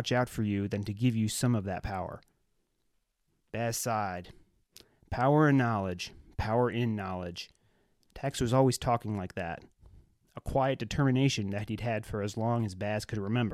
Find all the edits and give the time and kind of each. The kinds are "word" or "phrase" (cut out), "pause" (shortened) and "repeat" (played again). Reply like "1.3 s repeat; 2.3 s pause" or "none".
none